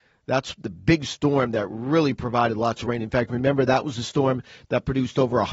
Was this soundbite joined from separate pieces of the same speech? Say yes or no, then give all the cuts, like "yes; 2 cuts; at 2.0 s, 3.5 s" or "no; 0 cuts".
no; 0 cuts